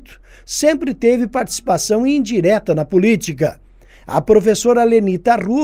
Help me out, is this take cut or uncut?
uncut